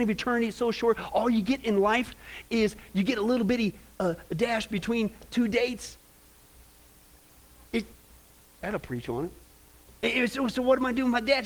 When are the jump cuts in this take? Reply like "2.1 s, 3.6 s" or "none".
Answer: none